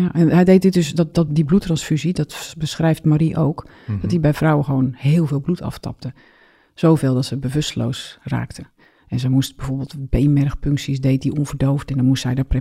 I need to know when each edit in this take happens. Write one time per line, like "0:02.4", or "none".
none